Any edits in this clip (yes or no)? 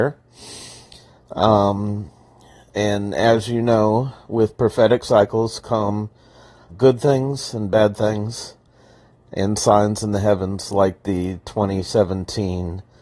yes